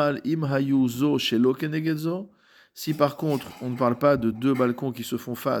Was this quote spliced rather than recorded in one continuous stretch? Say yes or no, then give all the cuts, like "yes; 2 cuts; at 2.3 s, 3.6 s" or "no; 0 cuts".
no; 0 cuts